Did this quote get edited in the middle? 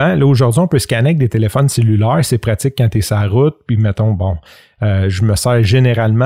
no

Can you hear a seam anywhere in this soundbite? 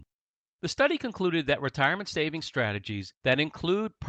no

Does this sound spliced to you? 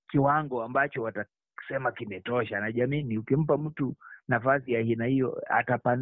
no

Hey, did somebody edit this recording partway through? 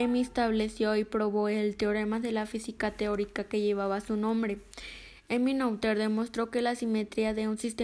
no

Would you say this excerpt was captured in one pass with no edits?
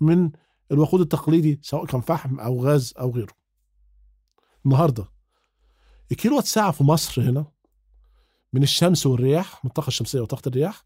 yes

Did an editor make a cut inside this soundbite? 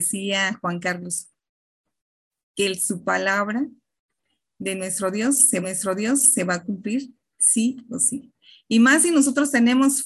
yes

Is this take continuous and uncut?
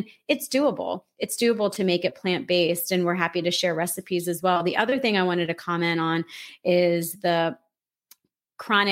yes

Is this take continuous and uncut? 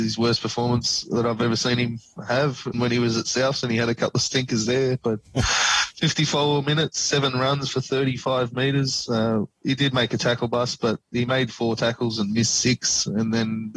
no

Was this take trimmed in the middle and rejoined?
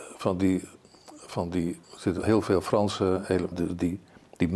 yes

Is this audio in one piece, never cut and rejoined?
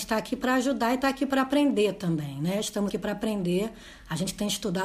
no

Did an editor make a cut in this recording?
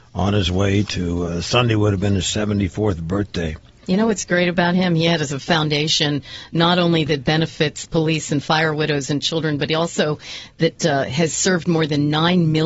no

